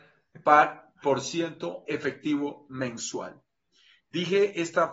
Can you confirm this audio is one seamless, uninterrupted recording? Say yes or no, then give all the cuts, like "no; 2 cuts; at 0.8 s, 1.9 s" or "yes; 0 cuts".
yes; 0 cuts